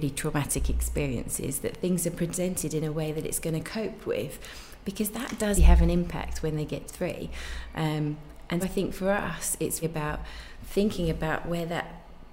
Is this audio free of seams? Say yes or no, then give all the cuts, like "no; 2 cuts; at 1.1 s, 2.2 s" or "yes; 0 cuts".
no; 4 cuts; at 5.6 s, 6.9 s, 8.6 s, 9.8 s